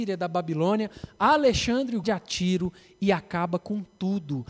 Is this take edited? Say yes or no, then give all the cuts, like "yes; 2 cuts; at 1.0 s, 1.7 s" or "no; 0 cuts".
yes; 1 cut; at 2.0 s